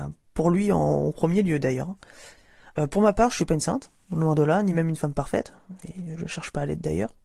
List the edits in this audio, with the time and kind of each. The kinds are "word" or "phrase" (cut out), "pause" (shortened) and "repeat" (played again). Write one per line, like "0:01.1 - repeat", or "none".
none